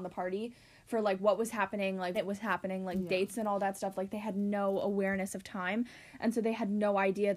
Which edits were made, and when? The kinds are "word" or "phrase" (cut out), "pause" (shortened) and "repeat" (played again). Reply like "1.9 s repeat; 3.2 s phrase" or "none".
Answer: 2.1 s word

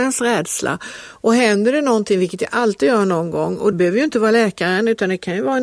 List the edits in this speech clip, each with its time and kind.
3.7 s word

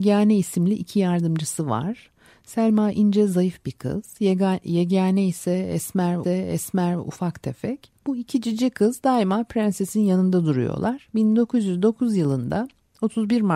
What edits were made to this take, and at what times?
6.2 s repeat; 8.0 s pause

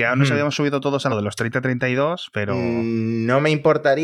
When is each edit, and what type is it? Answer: 1.1 s word

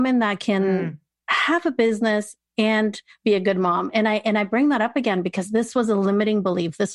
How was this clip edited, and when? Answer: none

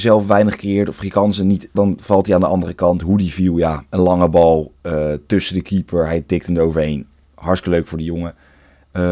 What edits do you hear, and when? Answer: 1.7 s phrase

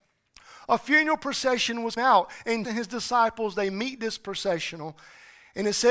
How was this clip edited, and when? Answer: 2.0 s word; 2.6 s word

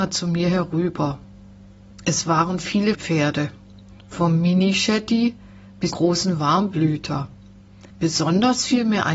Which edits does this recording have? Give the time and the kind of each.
2.9 s word; 4.0 s pause; 5.9 s word; 7.9 s pause

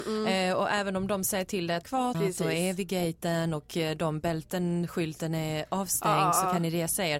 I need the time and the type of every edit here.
1.8 s word; 2.1 s phrase

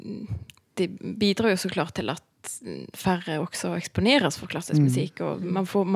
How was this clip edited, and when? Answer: none

